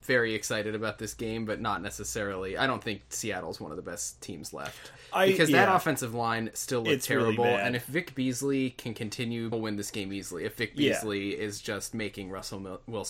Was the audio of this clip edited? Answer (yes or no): yes